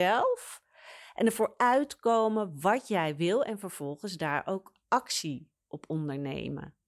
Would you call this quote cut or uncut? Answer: uncut